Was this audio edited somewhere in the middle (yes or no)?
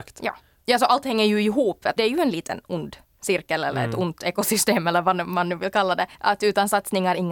yes